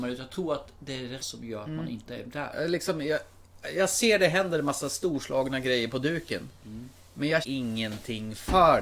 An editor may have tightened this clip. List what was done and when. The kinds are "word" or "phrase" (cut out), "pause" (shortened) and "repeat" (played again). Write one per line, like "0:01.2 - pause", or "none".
0:01.2 - word
0:07.4 - word